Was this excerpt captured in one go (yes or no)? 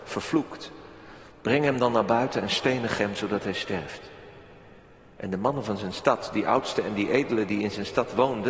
yes